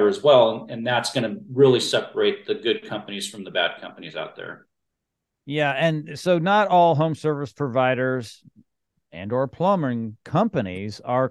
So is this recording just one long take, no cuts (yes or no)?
yes